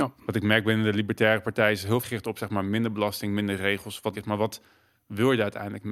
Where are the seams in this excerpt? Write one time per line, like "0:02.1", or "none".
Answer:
0:02.0
0:04.1